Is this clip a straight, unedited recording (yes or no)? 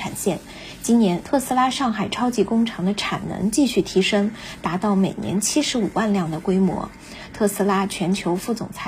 yes